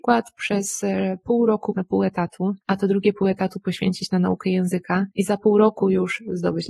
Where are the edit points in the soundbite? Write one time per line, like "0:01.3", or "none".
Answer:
0:01.7
0:02.6
0:05.1